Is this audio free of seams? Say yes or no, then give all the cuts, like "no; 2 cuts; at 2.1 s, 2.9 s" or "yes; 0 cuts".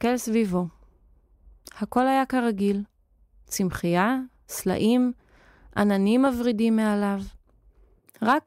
yes; 0 cuts